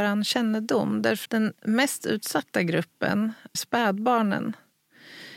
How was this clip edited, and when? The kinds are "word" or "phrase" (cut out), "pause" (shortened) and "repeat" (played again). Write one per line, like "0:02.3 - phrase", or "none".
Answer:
0:01.3 - word
0:03.5 - word